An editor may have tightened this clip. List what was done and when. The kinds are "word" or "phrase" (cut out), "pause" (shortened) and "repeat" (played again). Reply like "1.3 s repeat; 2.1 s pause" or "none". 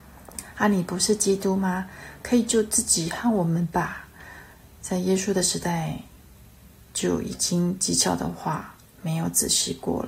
none